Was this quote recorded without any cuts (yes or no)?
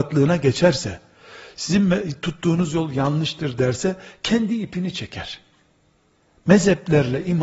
yes